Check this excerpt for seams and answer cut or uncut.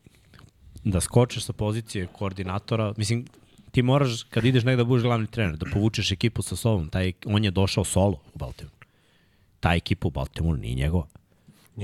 uncut